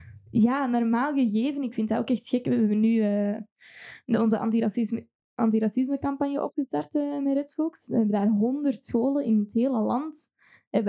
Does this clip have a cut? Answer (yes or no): no